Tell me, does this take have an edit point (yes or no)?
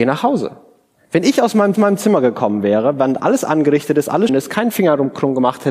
yes